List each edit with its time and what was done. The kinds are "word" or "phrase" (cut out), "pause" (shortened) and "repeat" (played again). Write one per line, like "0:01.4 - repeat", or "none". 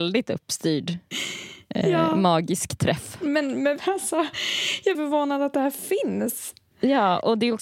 0:03.8 - word
0:04.9 - phrase